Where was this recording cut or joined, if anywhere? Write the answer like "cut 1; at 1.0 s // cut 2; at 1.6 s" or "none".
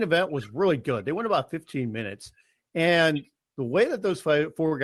none